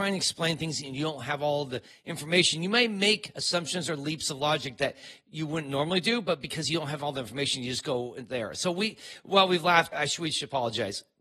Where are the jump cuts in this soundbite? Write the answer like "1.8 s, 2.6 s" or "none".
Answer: 9.9 s